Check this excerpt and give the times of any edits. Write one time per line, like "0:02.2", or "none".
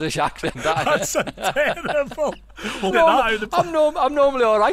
0:02.9